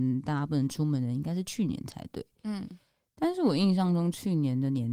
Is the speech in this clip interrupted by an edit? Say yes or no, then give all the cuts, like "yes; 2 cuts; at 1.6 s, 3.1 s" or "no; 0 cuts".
no; 0 cuts